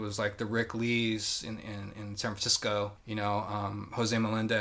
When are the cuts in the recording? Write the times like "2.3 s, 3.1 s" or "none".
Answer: none